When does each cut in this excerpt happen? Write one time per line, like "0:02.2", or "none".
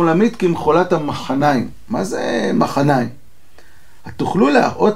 none

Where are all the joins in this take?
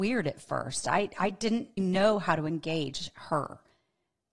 0:01.8

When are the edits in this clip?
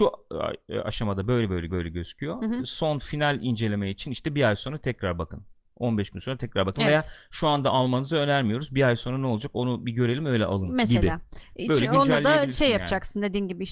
0:01.7

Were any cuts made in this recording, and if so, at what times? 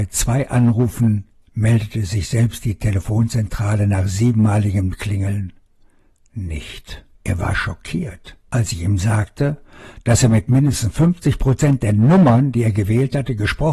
0:01.4
0:07.1
0:08.4

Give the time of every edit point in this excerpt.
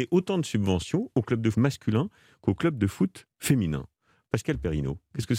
0:01.5

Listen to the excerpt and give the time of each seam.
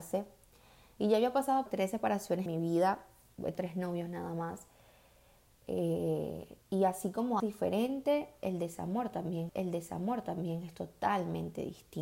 0:01.7
0:02.5
0:03.5
0:06.6
0:07.4
0:09.5

